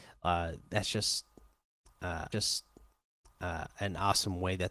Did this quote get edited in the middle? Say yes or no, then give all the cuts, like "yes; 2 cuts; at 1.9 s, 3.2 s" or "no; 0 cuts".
yes; 1 cut; at 2.3 s